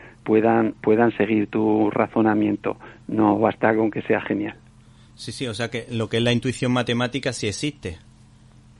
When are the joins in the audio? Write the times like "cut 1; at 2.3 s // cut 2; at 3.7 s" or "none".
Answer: none